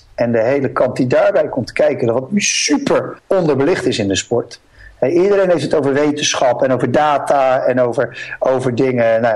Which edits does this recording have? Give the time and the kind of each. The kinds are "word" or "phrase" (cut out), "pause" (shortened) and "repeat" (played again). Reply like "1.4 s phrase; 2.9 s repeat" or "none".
3.2 s pause